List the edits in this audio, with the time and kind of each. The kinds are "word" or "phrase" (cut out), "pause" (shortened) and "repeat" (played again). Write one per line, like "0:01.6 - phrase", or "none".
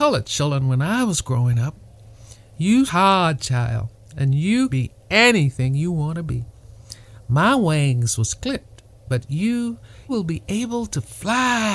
0:02.9 - word
0:04.7 - word
0:10.1 - word